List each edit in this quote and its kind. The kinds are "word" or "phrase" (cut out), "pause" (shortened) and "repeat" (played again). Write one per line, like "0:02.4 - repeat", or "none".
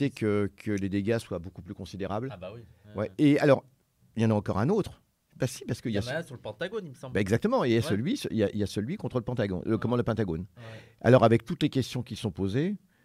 none